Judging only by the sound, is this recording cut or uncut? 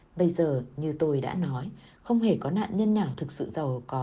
uncut